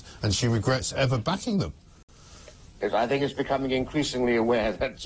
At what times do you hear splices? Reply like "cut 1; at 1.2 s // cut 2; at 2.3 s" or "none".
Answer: none